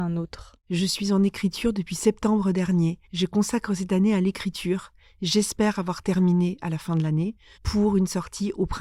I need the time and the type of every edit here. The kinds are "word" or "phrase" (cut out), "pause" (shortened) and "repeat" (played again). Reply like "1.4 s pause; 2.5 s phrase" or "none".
3.0 s pause; 7.5 s pause